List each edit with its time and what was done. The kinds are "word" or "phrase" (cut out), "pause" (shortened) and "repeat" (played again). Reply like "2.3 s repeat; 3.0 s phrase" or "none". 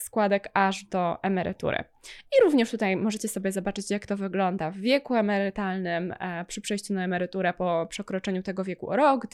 none